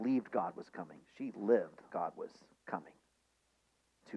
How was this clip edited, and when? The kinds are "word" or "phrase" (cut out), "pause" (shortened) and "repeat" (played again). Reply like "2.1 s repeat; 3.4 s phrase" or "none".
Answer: 1.9 s word